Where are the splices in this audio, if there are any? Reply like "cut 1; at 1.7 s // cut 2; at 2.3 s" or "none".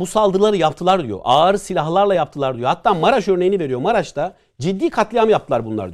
none

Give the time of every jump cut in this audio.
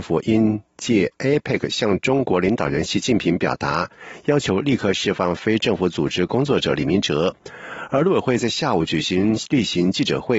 none

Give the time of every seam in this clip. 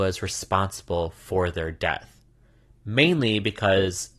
none

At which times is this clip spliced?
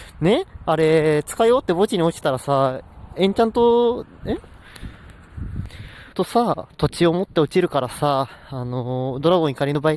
cut 1; at 6.1 s

